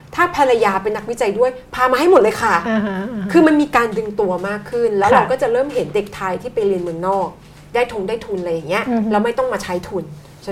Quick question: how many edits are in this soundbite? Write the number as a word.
zero